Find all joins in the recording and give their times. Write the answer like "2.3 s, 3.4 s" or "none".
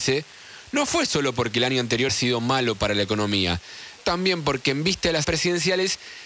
2.1 s, 4.0 s, 5.2 s